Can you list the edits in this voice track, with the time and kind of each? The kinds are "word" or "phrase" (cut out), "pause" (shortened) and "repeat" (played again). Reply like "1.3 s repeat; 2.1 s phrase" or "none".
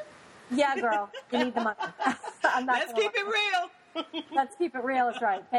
none